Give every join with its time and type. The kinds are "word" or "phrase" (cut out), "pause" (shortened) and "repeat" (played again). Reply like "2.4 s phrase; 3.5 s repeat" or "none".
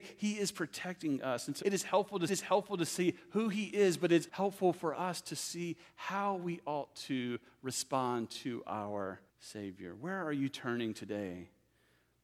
1.6 s phrase; 2.3 s repeat; 4.3 s word; 9.3 s pause